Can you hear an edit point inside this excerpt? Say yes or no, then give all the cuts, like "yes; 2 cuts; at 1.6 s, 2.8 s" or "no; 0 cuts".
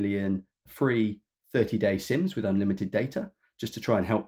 no; 0 cuts